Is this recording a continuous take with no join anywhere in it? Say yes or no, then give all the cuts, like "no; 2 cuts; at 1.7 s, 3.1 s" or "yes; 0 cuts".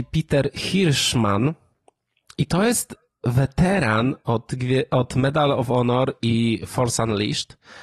yes; 0 cuts